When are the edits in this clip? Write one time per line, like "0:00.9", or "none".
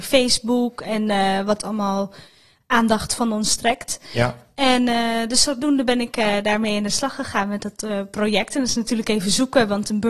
none

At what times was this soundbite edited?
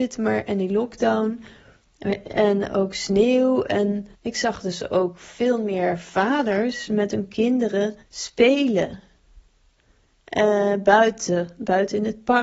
0:04.2
0:08.0

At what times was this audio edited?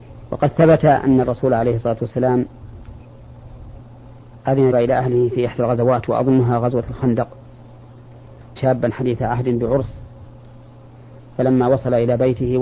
0:04.7
0:08.6

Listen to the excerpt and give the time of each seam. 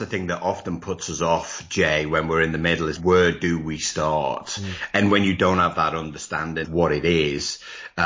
0:03.0
0:06.6

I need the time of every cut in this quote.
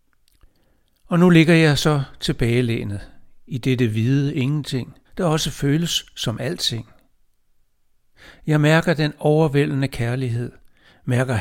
0:05.0

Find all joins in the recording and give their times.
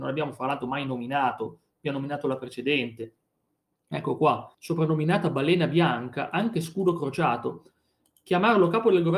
0:04.5

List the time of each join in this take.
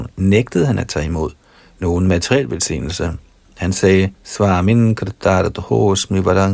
0:01.6
0:04.1

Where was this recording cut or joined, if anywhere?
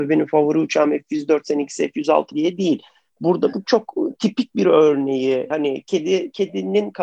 0:02.3
0:03.5
0:05.5

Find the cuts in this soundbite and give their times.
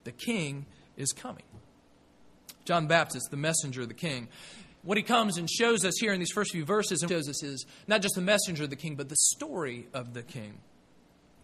0:07.1

